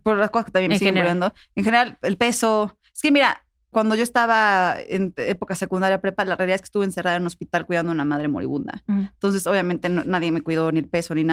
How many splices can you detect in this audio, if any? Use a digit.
1